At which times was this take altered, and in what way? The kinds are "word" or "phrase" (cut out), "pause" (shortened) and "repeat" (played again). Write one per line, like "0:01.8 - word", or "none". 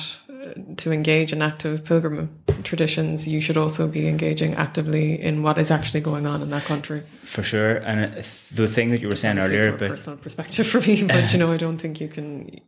none